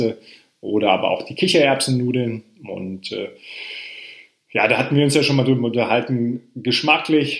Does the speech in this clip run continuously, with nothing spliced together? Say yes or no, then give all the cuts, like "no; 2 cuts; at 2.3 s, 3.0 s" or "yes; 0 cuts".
yes; 0 cuts